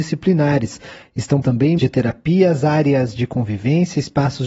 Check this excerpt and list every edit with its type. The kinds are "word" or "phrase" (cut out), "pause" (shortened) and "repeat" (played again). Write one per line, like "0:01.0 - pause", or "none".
0:01.4 - word
0:01.8 - word